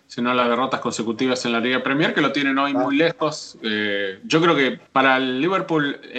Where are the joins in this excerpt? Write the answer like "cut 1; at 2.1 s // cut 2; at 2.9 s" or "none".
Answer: cut 1; at 4.9 s